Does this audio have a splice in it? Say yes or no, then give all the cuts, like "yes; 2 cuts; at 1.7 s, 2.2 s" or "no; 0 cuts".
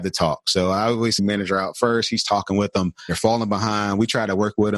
yes; 1 cut; at 1.2 s